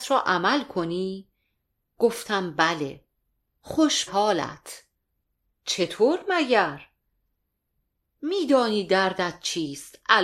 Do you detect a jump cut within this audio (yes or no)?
yes